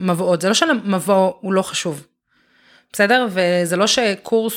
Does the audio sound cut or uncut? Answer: uncut